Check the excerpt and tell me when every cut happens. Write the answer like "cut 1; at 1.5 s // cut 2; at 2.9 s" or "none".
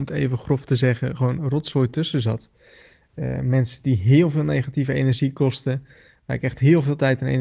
none